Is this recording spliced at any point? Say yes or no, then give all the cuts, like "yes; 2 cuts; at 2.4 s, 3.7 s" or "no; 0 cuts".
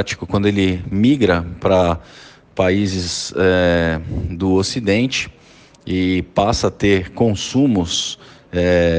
no; 0 cuts